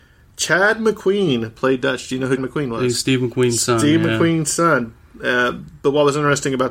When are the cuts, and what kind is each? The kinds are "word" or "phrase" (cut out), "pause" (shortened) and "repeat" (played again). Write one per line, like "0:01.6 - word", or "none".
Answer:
0:02.4 - word